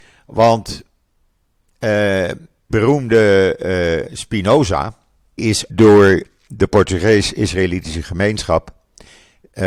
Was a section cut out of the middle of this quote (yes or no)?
yes